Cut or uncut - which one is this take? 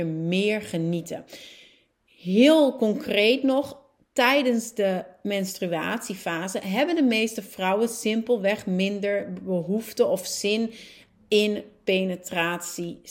uncut